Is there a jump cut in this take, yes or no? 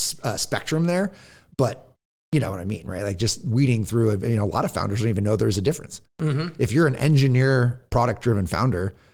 no